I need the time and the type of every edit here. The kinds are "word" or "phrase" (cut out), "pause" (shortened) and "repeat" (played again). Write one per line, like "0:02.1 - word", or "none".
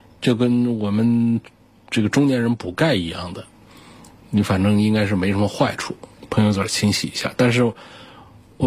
none